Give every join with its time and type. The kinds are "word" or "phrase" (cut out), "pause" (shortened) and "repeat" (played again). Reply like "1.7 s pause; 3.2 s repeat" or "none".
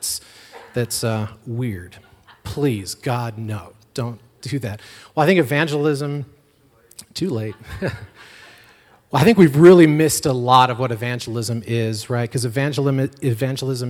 none